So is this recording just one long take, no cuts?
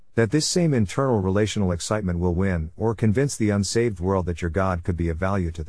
yes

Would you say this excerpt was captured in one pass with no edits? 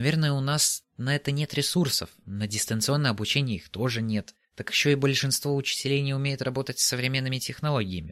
no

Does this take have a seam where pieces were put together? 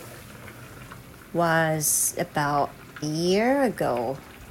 yes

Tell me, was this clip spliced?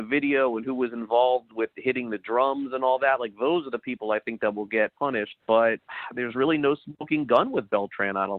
yes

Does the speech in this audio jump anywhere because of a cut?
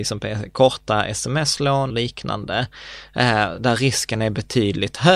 yes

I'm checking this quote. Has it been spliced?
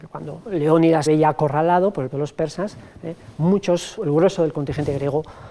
yes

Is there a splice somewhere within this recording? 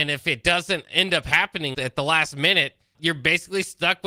yes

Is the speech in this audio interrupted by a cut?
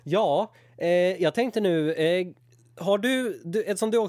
no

